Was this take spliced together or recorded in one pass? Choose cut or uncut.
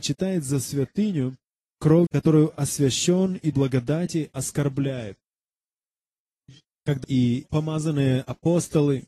cut